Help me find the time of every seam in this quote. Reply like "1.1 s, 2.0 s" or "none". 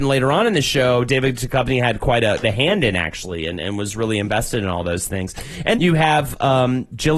2.4 s, 5.7 s